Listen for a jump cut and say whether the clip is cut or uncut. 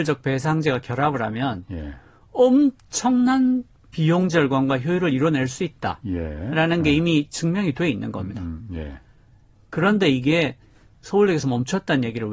uncut